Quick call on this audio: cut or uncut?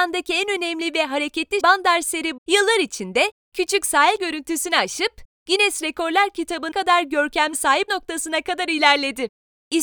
cut